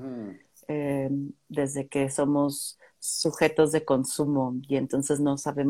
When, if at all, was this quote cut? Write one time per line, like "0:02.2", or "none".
none